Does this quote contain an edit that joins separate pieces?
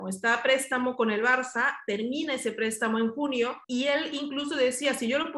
yes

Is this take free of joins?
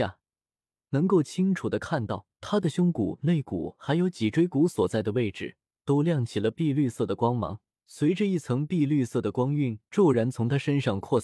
no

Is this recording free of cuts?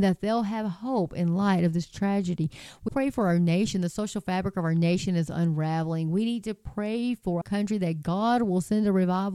no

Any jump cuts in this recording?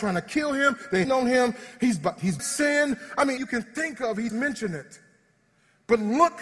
yes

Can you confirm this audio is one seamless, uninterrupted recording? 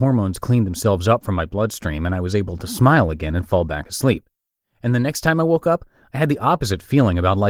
yes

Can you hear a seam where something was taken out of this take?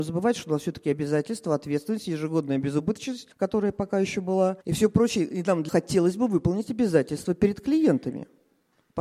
yes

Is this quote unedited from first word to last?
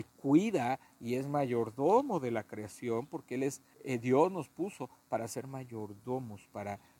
no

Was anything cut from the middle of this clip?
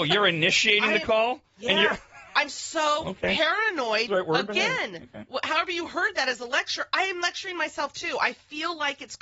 yes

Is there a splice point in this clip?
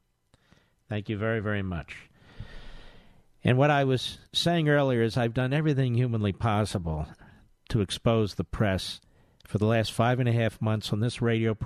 no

